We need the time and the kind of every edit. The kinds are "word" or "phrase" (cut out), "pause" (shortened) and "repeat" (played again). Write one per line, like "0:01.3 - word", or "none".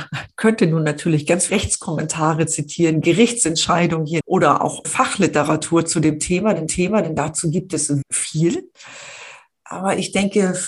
0:01.5 - word
0:04.2 - word
0:04.8 - word
0:06.7 - repeat
0:08.0 - word

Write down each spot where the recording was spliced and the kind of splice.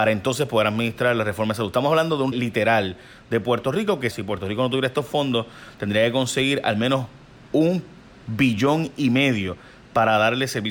0:02.3 - word
0:04.1 - word

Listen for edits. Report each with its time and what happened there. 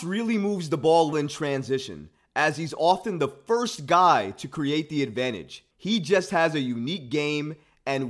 0:01.1 - word
0:05.7 - pause

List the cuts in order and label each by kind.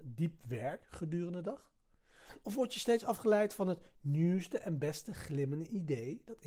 none

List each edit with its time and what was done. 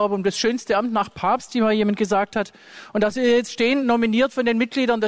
none

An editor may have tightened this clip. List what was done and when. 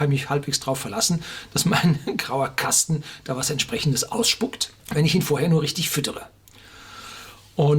0:04.8 - pause

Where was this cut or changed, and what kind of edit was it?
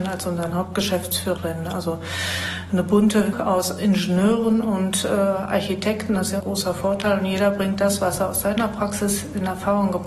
0:01.4 - word
0:03.3 - word
0:06.4 - word

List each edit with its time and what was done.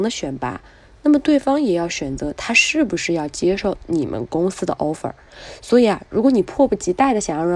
none

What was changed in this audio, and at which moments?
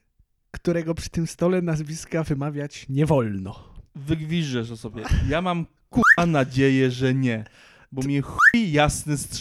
none

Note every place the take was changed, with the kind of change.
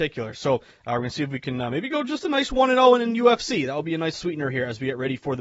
0:04.1 - phrase

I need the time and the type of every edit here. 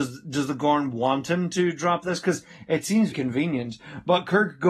0:03.1 - word

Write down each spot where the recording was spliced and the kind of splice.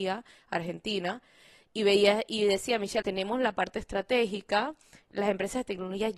0:03.0 - word

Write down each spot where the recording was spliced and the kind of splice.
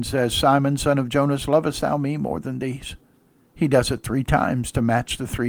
none

